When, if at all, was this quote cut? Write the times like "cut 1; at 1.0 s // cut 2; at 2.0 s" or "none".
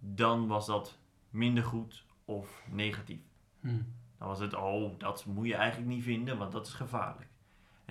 none